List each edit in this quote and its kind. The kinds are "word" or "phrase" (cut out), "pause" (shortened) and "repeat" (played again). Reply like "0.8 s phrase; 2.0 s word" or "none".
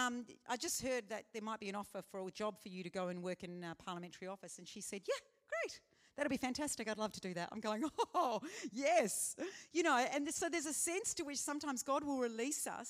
none